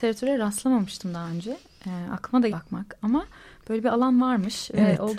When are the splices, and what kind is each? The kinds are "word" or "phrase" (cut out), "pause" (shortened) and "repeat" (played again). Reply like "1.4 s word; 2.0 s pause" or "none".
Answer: 2.5 s word